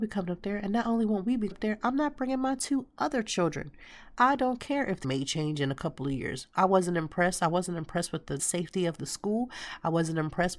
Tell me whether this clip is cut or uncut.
cut